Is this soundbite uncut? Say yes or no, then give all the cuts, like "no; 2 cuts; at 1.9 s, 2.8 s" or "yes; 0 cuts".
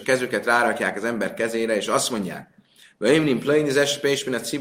yes; 0 cuts